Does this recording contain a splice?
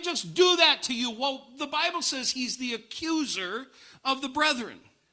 no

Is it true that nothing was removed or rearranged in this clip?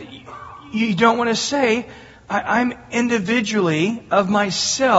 yes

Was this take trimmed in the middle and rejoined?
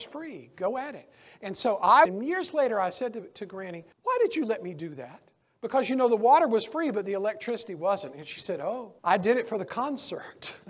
yes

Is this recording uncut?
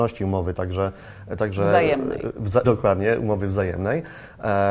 no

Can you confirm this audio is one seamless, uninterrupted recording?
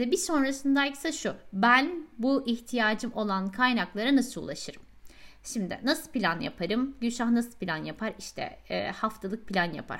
yes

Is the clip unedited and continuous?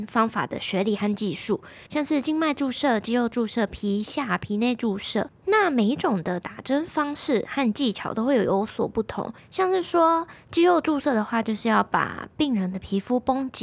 no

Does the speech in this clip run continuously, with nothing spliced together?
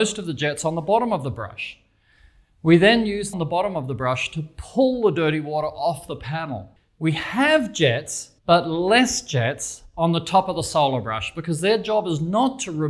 no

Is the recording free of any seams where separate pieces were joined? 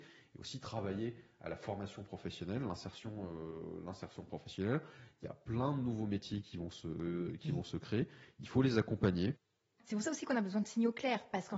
yes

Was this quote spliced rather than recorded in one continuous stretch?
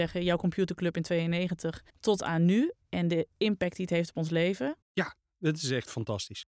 yes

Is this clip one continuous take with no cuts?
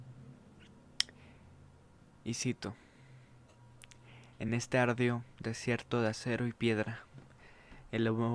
yes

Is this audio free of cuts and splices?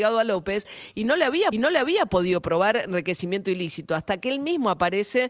no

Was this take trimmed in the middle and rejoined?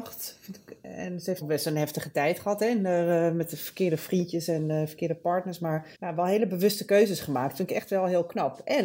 yes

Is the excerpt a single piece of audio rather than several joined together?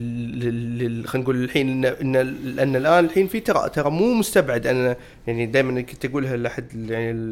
yes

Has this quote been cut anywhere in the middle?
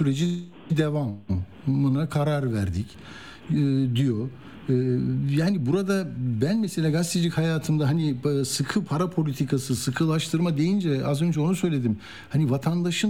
no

